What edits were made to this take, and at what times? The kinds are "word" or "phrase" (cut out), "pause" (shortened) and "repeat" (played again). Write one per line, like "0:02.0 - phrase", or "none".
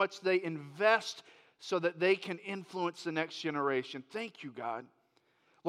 none